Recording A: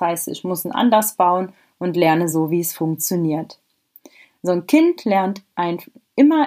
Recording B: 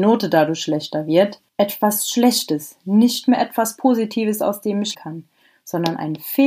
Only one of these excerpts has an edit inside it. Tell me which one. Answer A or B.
B